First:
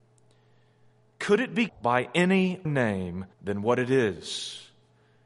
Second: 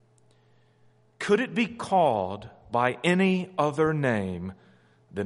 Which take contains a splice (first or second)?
first